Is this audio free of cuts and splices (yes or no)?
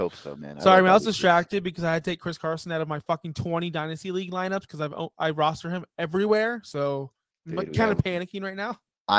yes